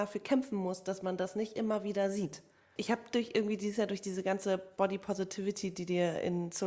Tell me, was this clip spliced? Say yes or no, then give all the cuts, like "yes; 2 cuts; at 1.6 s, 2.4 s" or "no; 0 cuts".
no; 0 cuts